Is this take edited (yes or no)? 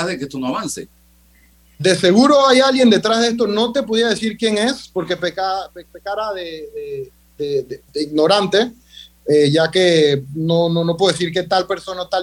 yes